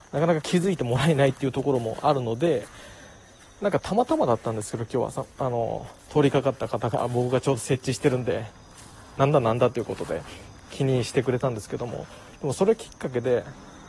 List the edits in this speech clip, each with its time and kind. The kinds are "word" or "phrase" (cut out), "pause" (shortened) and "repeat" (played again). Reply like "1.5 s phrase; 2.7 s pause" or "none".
6.0 s pause